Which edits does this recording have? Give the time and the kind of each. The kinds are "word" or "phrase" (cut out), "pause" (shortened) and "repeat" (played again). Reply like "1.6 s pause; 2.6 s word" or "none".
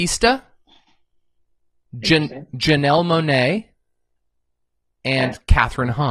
none